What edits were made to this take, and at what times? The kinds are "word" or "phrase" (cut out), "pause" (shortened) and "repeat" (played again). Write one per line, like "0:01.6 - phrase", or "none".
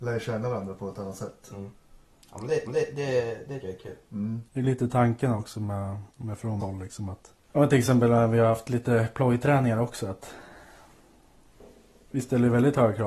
0:02.7 - repeat
0:03.6 - word
0:04.5 - pause
0:06.1 - pause
0:06.6 - phrase
0:07.4 - pause